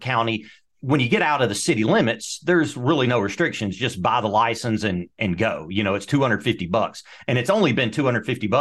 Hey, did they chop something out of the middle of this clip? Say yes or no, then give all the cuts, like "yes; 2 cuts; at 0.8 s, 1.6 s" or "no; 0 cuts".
no; 0 cuts